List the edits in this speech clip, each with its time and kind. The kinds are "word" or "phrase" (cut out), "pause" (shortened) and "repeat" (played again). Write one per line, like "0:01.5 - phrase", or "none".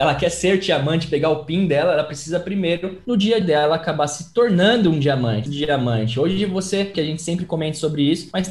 0:03.4 - word
0:05.5 - word
0:06.9 - word